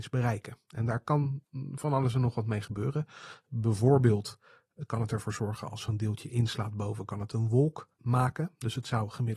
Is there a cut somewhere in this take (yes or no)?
yes